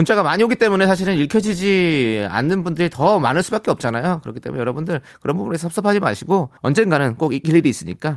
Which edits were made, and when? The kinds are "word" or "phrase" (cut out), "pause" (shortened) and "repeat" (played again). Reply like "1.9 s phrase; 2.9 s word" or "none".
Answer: 6.6 s pause